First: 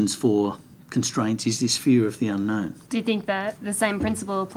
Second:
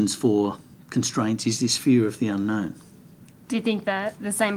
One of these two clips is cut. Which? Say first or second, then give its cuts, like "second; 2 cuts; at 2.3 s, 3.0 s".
first; 1 cut; at 2.9 s